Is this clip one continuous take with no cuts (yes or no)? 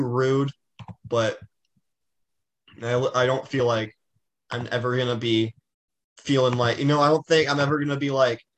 yes